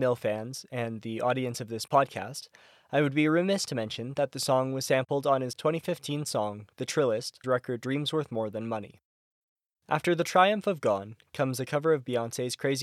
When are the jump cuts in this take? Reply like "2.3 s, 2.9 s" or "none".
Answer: 7.4 s